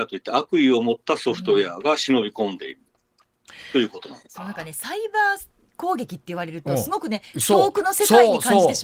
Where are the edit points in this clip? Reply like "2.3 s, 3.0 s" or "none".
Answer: none

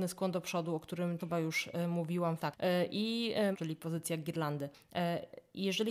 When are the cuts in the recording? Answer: 1.2 s, 2.4 s, 3.5 s

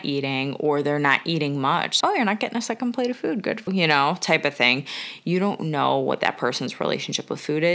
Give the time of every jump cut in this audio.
2.0 s, 3.7 s

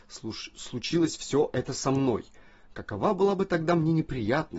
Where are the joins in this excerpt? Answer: none

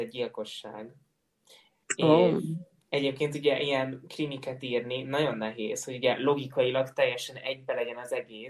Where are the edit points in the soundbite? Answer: none

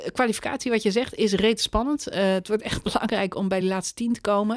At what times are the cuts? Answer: none

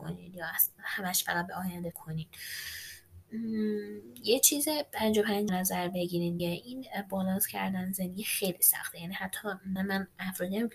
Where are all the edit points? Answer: 1.9 s, 5.5 s, 6.4 s, 9.8 s

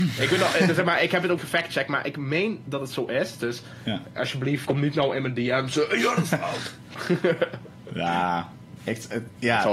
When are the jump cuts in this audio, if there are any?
1.4 s, 4.6 s

